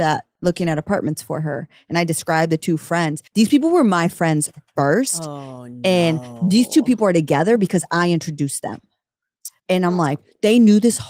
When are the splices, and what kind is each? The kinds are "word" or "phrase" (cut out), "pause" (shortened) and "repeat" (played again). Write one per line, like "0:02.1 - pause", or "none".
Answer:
0:03.3 - pause
0:09.6 - pause